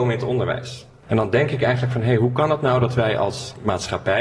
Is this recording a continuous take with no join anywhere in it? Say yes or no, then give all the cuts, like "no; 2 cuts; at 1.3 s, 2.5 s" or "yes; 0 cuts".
yes; 0 cuts